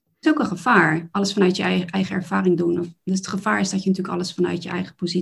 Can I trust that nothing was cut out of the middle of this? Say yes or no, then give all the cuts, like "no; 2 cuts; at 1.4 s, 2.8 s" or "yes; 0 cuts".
yes; 0 cuts